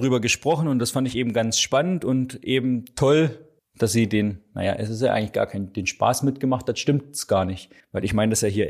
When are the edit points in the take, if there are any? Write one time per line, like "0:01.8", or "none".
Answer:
0:03.6
0:07.8